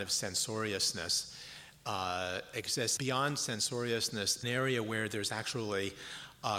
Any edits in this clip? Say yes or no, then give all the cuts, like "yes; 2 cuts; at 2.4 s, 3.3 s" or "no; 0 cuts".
yes; 2 cuts; at 3.0 s, 4.4 s